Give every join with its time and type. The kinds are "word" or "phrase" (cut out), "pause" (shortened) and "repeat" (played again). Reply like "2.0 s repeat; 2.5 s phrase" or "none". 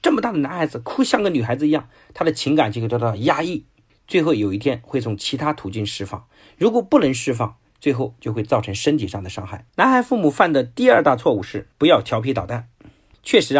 9.7 s pause; 11.7 s pause